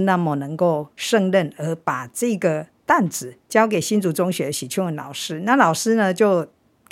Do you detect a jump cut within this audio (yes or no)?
yes